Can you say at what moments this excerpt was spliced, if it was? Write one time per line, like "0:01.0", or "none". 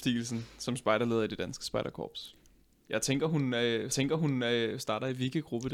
0:03.9